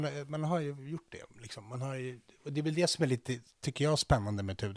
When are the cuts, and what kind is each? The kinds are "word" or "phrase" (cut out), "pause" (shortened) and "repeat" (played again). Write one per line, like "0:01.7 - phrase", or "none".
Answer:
none